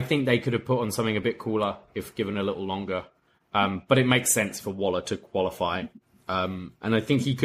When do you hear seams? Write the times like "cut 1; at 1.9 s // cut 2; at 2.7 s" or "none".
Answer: none